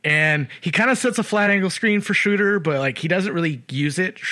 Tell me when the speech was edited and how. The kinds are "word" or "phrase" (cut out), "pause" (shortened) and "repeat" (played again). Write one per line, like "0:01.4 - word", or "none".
none